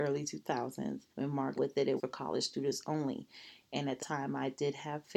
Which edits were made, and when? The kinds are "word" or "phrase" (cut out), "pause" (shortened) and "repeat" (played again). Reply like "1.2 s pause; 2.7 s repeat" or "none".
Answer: 1.1 s pause; 1.6 s phrase; 2.0 s word; 4.0 s word